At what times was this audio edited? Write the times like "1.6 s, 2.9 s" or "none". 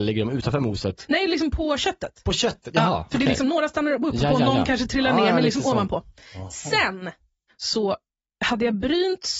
none